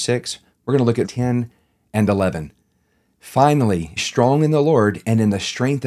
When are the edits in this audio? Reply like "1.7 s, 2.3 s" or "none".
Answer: 1.0 s, 4.0 s